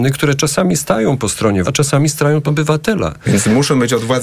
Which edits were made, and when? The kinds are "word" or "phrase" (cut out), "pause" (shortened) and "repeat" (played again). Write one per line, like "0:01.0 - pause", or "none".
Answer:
0:01.6 - word
0:02.5 - word